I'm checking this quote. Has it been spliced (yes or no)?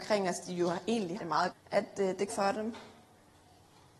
yes